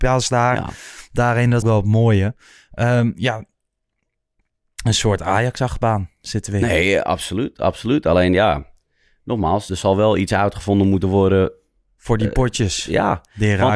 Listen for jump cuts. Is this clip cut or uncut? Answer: cut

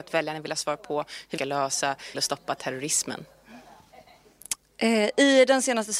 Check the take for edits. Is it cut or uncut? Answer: cut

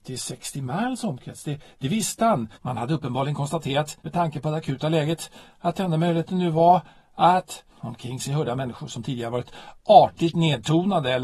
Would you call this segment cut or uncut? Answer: cut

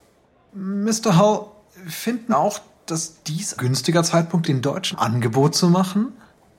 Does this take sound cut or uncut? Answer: cut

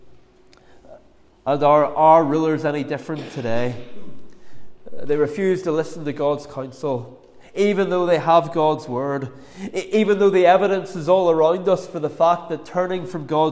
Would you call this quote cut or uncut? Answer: uncut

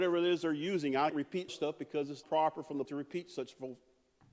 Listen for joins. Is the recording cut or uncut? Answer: cut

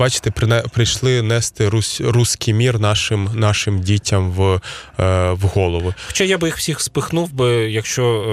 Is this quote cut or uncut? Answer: uncut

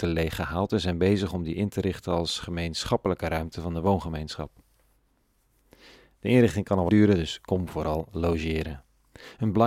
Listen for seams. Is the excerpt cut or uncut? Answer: cut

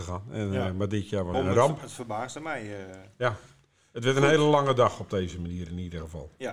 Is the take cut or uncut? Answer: cut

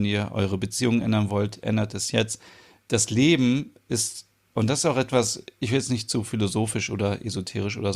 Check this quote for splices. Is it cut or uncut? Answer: uncut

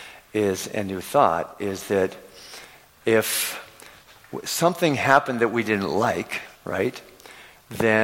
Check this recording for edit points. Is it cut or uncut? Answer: cut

